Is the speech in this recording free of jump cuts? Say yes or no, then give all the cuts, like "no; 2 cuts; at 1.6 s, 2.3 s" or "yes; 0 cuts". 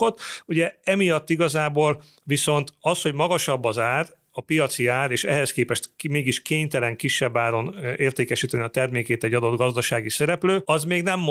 yes; 0 cuts